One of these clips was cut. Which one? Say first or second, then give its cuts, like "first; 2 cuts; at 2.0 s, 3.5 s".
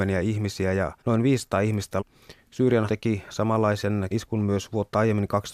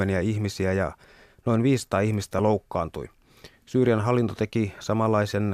first; 4 cuts; at 1.0 s, 2.0 s, 2.9 s, 4.1 s